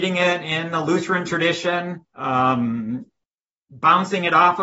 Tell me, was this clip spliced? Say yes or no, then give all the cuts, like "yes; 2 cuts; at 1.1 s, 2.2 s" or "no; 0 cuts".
yes; 1 cut; at 2.1 s